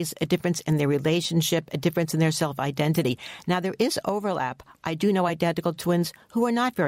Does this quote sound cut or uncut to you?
uncut